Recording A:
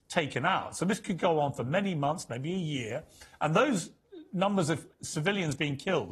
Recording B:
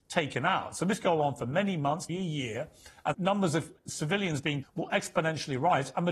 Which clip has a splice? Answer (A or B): B